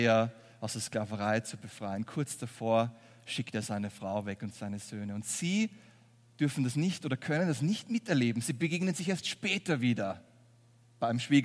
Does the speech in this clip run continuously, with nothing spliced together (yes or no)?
yes